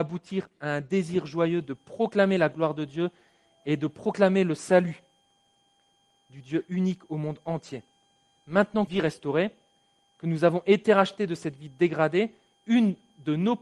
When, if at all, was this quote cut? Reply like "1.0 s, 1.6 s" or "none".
8.9 s

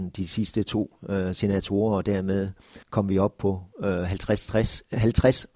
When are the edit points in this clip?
2.8 s, 3.7 s

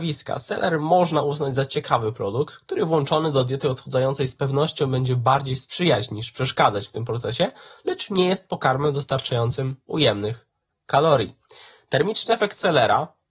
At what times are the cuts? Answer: none

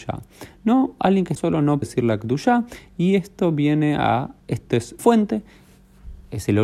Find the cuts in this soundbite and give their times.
1.4 s, 1.8 s, 4.4 s, 5.0 s

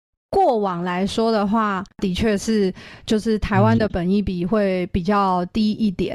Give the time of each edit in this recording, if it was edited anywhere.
1.9 s

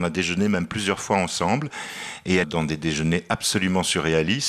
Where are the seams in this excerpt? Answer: 2.4 s

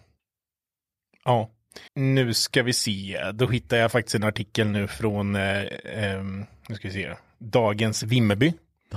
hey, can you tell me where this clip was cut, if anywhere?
1.9 s

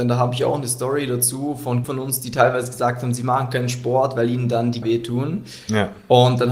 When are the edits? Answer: 1.8 s, 4.8 s

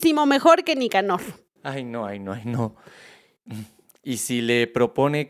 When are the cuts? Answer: none

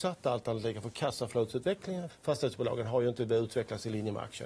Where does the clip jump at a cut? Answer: 2.1 s

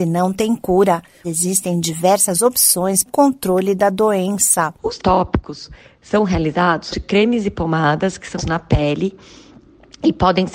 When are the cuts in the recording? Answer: 1.2 s, 3.1 s, 5.0 s, 6.9 s, 8.4 s

